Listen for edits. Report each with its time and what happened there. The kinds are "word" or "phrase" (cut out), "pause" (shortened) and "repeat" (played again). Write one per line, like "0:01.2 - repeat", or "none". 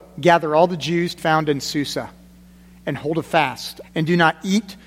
0:01.2 - word
0:03.8 - phrase